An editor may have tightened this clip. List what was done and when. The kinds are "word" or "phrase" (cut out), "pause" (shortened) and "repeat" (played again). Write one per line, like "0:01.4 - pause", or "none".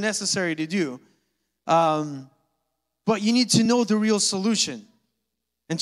none